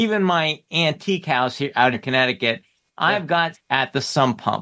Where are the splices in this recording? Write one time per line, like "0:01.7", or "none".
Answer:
0:01.9
0:03.5